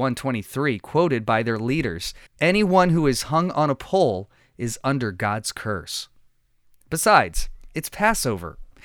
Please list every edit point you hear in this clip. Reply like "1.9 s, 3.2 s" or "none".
2.3 s